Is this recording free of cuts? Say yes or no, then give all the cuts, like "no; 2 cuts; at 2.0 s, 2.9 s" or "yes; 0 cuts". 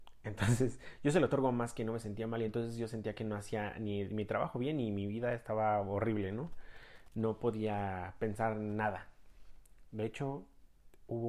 yes; 0 cuts